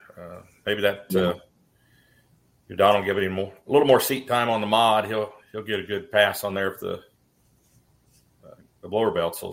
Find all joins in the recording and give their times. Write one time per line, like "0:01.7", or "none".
none